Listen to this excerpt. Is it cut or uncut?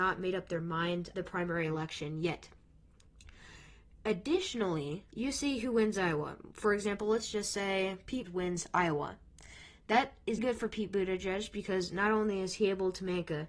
cut